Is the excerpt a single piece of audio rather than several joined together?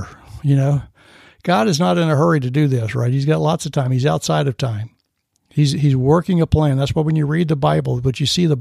yes; 0 cuts

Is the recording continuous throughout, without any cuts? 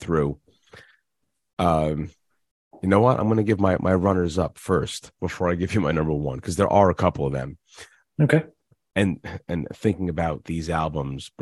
no; 1 cut; at 8.7 s

